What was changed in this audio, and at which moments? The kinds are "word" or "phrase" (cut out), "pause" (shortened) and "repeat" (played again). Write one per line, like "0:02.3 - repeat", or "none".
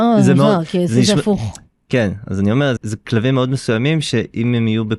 0:02.8 - word

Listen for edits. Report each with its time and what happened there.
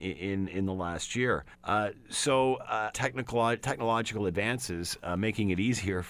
0:01.5 - pause
0:02.9 - word
0:03.6 - word

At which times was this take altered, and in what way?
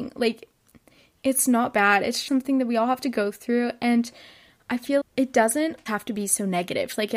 0:02.3 - word
0:05.0 - word
0:05.9 - word

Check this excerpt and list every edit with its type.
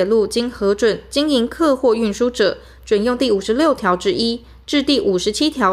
none

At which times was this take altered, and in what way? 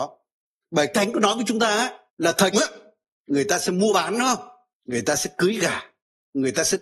0:00.9 - word
0:02.1 - pause
0:02.5 - phrase
0:04.7 - pause

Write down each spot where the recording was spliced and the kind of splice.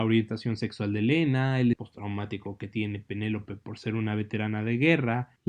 0:01.7 - word

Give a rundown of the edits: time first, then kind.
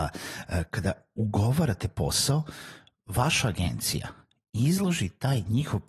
none

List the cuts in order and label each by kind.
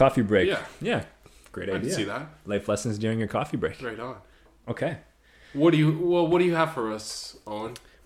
none

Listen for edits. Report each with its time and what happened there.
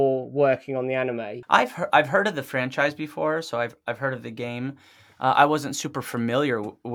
none

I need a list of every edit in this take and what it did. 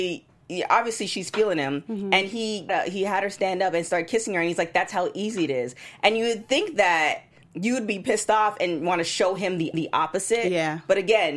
0:02.7 - word
0:07.4 - pause
0:09.7 - repeat

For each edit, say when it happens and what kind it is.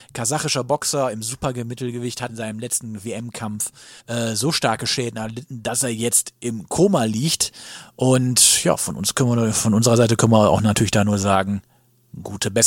0:02.3 - word
0:04.0 - pause

